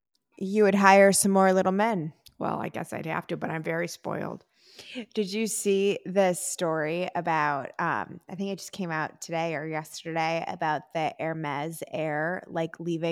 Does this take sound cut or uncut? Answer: uncut